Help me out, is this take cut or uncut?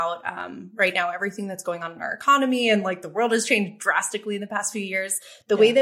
uncut